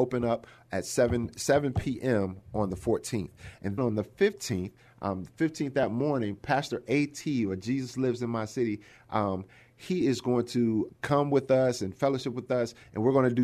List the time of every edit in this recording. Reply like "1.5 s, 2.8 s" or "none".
3.8 s, 10.9 s